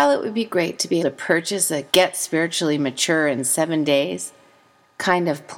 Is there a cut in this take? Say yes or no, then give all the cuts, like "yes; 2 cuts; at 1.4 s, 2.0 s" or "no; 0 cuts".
yes; 2 cuts; at 1.0 s, 1.9 s